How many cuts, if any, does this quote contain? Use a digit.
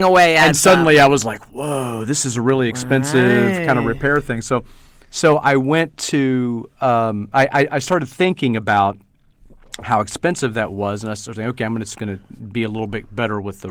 0